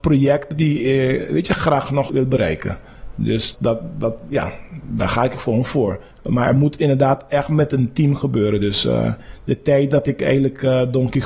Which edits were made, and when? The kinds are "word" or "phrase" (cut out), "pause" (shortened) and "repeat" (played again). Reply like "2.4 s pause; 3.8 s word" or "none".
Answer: 2.1 s word; 3.5 s word; 6.1 s pause